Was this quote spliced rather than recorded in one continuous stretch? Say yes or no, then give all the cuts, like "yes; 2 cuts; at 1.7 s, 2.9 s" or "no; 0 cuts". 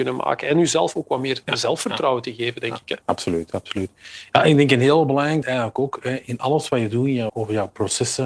yes; 3 cuts; at 3.0 s, 5.4 s, 7.3 s